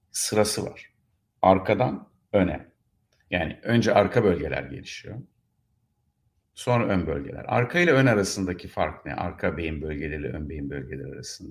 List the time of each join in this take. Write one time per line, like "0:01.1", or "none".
none